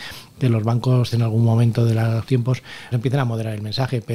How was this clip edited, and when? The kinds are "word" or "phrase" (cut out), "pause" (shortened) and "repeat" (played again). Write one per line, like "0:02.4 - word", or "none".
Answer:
0:01.1 - word
0:02.3 - word
0:02.9 - word